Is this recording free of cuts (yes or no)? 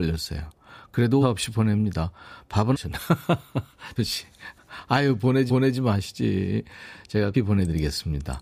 no